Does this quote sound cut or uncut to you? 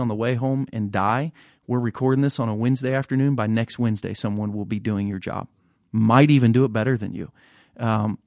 uncut